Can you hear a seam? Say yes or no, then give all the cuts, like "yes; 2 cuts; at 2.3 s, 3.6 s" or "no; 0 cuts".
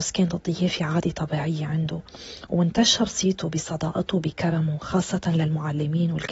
no; 0 cuts